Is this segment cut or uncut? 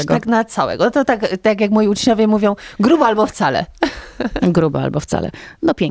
uncut